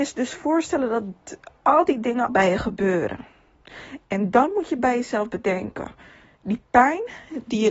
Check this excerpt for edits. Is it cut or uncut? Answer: cut